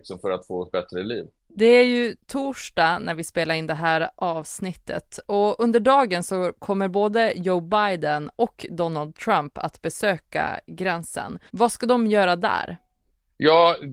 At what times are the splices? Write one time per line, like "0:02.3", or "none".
0:01.4
0:11.5